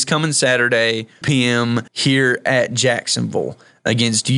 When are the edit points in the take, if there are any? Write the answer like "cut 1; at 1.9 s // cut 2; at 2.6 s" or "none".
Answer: cut 1; at 1.2 s // cut 2; at 1.9 s